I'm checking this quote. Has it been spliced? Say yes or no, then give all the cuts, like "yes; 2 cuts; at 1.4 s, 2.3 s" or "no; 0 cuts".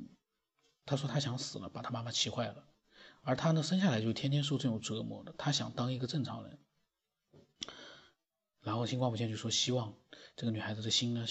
no; 0 cuts